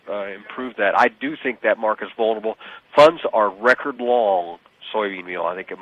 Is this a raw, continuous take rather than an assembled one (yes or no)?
yes